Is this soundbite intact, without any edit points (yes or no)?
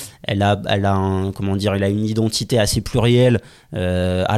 yes